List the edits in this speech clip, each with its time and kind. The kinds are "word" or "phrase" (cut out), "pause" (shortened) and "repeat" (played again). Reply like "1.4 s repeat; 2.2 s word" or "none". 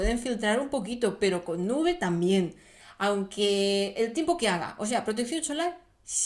none